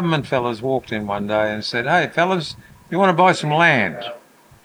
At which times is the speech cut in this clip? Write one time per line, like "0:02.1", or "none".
none